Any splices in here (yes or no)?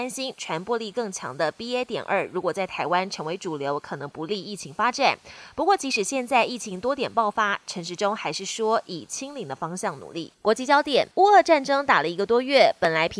yes